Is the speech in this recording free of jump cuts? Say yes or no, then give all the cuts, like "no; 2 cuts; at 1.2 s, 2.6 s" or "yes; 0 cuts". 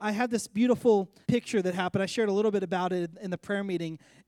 no; 1 cut; at 1.2 s